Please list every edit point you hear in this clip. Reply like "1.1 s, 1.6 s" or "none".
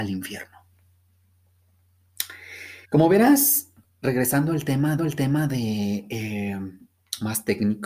2.8 s, 5.0 s